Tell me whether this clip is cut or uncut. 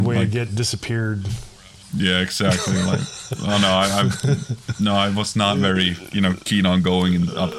uncut